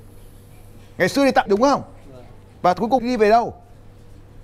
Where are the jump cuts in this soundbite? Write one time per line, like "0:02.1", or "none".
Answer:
0:01.5
0:03.0